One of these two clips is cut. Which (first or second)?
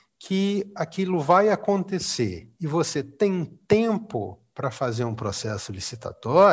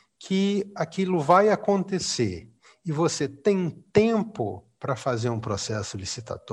first